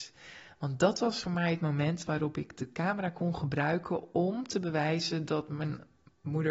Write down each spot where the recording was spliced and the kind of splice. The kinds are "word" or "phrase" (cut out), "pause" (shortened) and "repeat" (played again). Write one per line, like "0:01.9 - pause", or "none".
none